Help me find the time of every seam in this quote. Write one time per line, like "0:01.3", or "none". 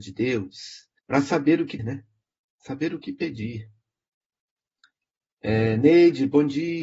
0:01.0
0:01.8